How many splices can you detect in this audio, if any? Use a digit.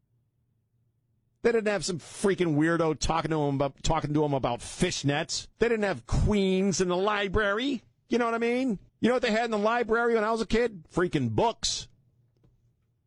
2